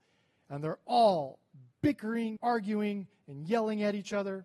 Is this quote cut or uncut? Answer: cut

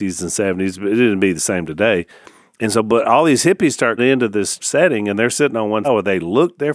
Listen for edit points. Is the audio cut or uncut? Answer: cut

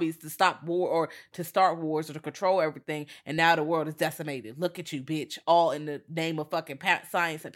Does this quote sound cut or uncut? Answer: uncut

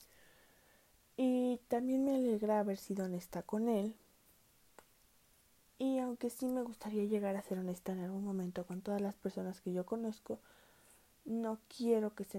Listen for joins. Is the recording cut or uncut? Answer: uncut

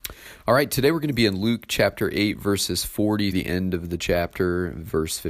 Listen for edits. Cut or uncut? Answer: cut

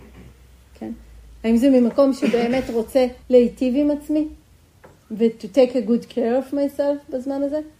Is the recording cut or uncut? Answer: cut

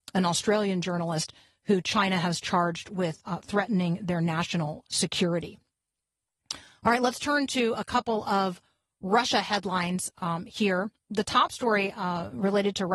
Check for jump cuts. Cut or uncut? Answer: uncut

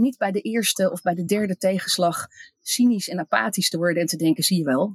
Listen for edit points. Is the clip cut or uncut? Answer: uncut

